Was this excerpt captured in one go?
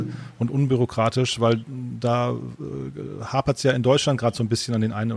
yes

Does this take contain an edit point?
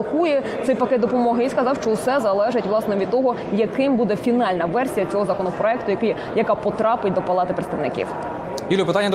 no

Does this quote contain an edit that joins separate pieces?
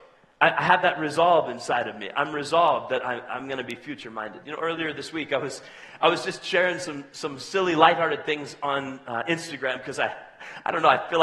no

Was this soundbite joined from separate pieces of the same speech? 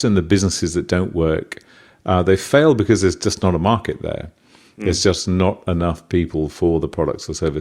no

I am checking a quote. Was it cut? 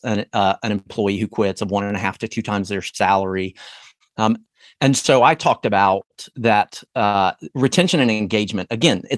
no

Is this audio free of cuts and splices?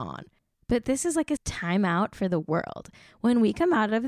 no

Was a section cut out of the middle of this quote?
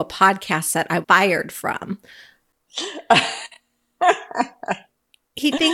yes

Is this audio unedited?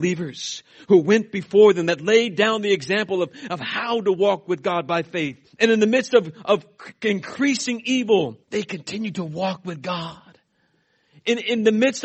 no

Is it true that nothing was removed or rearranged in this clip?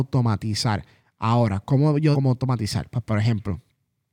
no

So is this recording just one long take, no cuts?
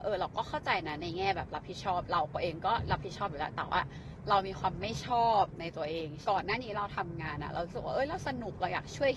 no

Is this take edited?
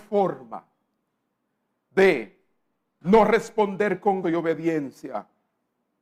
yes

